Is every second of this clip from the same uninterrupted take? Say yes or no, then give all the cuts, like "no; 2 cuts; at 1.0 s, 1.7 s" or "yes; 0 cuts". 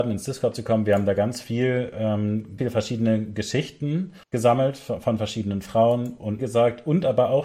no; 3 cuts; at 2.6 s, 4.2 s, 6.4 s